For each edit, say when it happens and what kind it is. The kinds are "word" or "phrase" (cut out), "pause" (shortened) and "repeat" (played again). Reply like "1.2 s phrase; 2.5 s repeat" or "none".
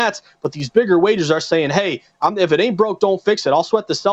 none